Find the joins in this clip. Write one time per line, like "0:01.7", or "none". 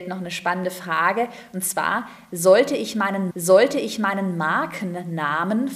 0:03.3